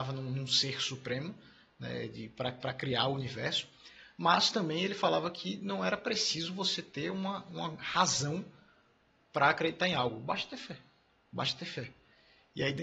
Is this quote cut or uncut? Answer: uncut